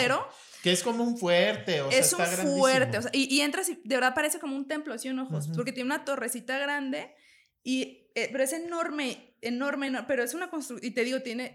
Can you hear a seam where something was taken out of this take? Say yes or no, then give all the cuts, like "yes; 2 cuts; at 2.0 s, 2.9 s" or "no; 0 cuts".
no; 0 cuts